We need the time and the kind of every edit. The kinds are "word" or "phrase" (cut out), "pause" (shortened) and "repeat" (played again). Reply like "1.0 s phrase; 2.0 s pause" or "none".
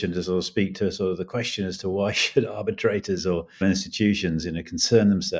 3.6 s word